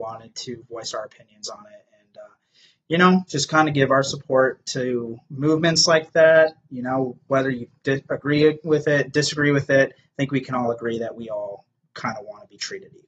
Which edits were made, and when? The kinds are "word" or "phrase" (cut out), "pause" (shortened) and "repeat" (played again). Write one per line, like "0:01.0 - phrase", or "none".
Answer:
none